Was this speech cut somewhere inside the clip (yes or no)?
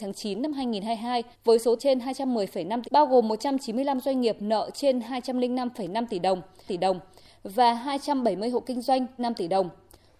yes